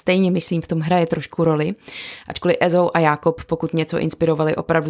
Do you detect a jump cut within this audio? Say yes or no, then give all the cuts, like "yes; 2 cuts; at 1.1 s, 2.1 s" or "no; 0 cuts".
no; 0 cuts